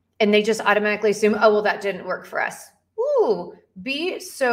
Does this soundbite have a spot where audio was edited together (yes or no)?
no